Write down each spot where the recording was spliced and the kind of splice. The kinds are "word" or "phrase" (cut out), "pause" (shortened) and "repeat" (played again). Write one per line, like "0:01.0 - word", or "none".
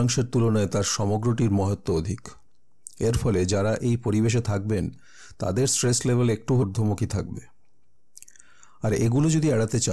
0:06.6 - word